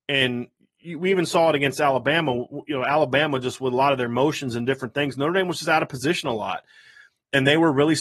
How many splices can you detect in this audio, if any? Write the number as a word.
zero